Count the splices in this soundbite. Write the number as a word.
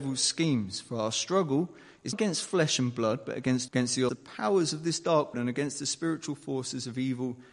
four